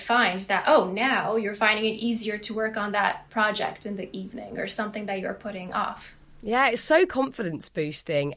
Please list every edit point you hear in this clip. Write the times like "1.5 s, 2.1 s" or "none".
none